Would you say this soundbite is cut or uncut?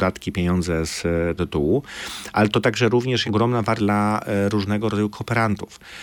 cut